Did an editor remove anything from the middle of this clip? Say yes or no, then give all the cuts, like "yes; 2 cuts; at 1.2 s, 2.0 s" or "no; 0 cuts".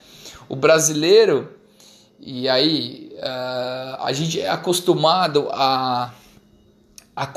no; 0 cuts